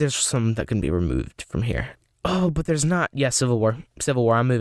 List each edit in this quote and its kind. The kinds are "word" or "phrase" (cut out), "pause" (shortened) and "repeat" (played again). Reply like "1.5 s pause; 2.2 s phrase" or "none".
none